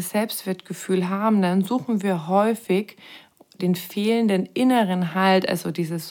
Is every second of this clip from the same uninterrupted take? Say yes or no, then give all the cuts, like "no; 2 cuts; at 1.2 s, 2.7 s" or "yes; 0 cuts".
yes; 0 cuts